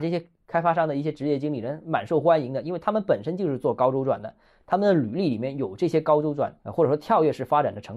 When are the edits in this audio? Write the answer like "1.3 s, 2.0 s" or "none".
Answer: 6.6 s